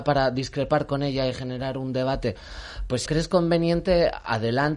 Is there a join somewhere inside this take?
yes; 1 cut; at 3.1 s

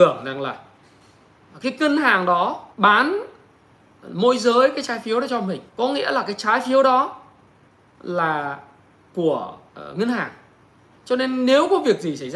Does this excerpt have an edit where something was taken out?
yes; 3 cuts; at 2.7 s, 5.7 s, 9.7 s

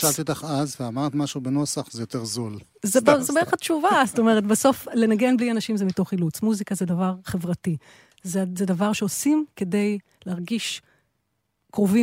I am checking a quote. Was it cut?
no; 0 cuts

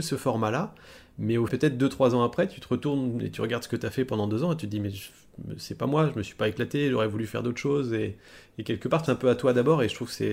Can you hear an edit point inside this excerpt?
yes; 2 cuts; at 1.5 s, 9.1 s

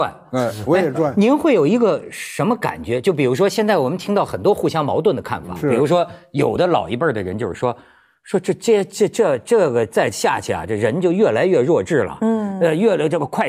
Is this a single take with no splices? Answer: yes; 0 cuts

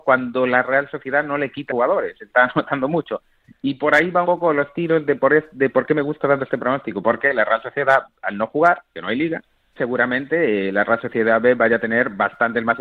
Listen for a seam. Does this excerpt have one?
yes; 3 cuts; at 1.7 s, 4.2 s, 9.8 s

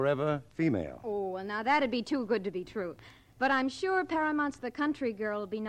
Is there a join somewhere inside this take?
no; 0 cuts

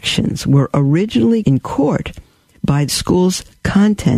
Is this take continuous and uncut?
no; 2 cuts; at 1.4 s, 2.9 s

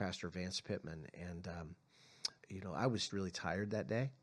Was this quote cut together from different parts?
yes; 2 cuts; at 2.4 s, 3.1 s

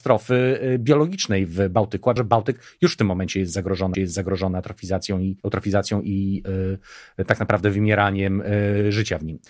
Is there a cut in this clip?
yes; 3 cuts; at 2.2 s, 3.9 s, 5.4 s

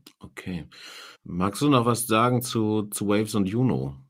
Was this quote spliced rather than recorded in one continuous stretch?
yes; 1 cut; at 1.1 s

